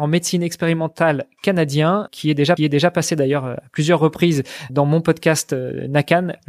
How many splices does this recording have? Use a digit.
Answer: 3